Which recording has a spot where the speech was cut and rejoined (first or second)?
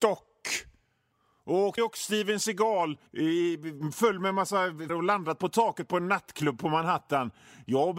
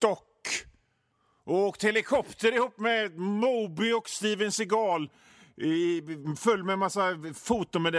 first